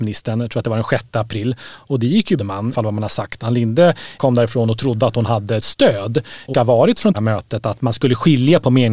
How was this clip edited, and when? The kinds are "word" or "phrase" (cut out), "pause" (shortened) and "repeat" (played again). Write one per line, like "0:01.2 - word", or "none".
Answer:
0:02.4 - phrase
0:02.7 - phrase
0:05.6 - word
0:06.5 - word
0:07.1 - phrase